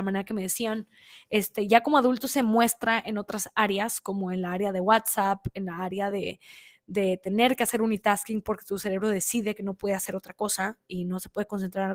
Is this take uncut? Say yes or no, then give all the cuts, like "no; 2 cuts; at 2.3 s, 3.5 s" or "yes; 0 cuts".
yes; 0 cuts